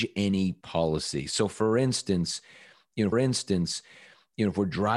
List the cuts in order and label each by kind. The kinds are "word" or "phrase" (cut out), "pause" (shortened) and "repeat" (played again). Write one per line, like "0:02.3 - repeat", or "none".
0:03.1 - repeat